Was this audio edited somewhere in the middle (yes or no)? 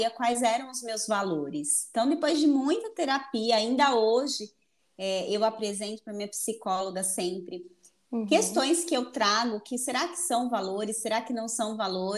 no